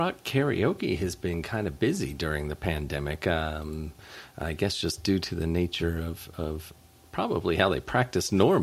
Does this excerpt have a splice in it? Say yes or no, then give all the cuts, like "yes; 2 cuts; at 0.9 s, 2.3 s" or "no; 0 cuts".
no; 0 cuts